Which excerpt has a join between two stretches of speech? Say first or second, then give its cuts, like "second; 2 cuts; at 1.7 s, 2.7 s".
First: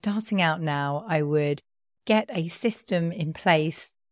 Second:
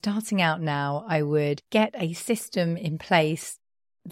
second; 1 cut; at 1.7 s